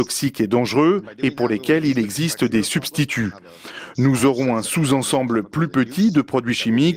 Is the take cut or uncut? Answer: uncut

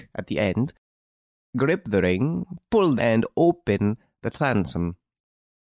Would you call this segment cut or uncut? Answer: cut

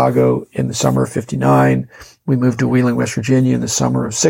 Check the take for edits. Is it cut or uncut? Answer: uncut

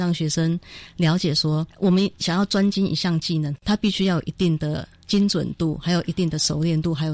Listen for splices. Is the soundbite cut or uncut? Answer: cut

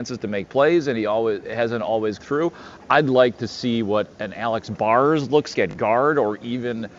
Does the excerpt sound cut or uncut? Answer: cut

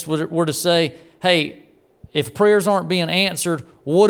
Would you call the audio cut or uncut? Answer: uncut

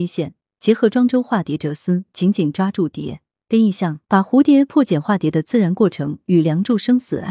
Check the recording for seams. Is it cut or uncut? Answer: cut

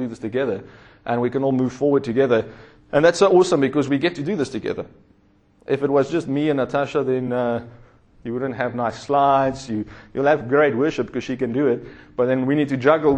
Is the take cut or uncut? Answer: uncut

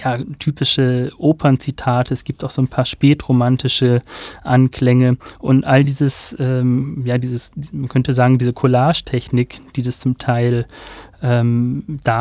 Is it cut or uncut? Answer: uncut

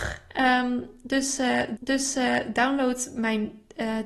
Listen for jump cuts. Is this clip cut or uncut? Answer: cut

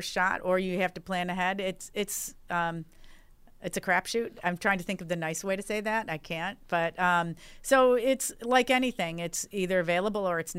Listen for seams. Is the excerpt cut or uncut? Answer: uncut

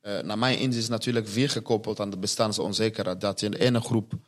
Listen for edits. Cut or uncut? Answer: uncut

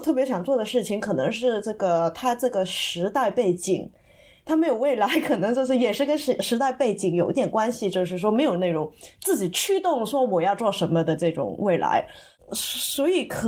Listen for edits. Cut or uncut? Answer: uncut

